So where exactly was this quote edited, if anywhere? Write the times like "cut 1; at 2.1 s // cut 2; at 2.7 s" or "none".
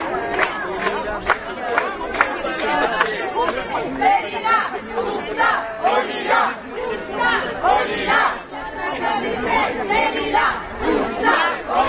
none